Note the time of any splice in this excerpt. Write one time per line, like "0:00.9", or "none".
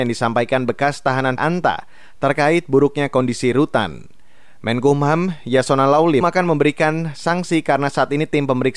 0:01.4
0:06.2